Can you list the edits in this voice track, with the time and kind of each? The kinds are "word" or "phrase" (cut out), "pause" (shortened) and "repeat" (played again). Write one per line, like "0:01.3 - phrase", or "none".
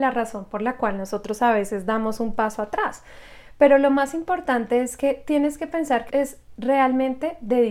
0:06.1 - word

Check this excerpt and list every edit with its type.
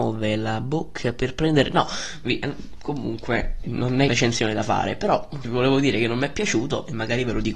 0:03.6 - word
0:04.1 - phrase
0:05.4 - word

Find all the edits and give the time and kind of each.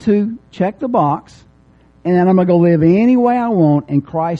none

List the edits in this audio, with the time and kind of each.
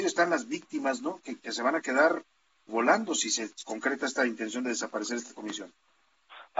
0:01.4 - word
0:02.7 - word

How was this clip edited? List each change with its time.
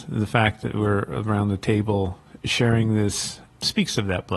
none

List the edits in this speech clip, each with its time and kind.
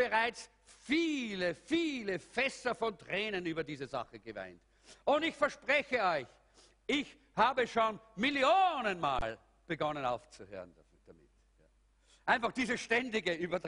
none

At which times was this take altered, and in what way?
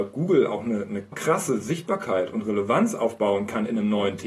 0:01.1 - word

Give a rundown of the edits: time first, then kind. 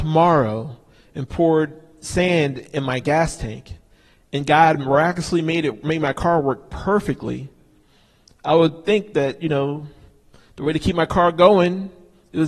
none

